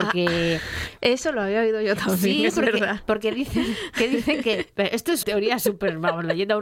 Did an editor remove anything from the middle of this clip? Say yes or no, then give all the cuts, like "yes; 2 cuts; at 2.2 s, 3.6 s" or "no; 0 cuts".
yes; 1 cut; at 5.2 s